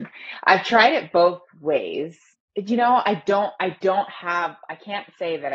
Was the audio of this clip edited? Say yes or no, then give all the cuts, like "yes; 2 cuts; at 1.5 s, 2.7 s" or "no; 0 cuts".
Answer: no; 0 cuts